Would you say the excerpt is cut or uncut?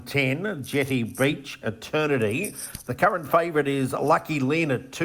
cut